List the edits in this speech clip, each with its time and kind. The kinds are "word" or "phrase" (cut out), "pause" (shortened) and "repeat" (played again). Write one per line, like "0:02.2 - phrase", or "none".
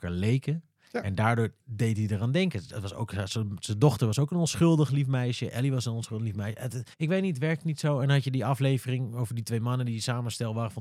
0:06.9 - pause